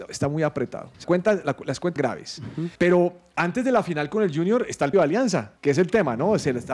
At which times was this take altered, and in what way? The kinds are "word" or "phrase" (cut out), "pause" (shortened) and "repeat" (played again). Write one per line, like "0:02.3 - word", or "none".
0:01.0 - word
0:02.0 - word
0:02.8 - pause
0:04.9 - word
0:05.6 - pause